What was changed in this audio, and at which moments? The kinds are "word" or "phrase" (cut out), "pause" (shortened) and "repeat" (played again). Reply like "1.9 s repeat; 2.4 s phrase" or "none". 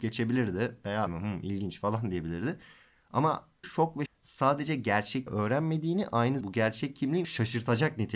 1.1 s word; 3.6 s word; 4.1 s word; 5.3 s word; 6.4 s word; 7.2 s word